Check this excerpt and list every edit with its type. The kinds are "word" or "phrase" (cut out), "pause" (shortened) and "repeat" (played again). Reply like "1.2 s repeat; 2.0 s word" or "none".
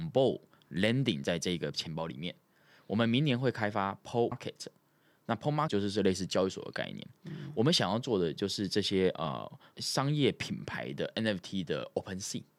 4.3 s word; 5.7 s word